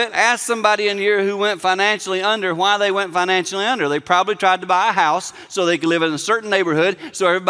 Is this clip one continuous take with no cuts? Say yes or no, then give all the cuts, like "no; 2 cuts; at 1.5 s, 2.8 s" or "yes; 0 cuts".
yes; 0 cuts